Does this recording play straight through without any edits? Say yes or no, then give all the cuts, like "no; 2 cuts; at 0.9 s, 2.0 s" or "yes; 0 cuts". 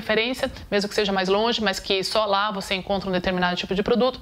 yes; 0 cuts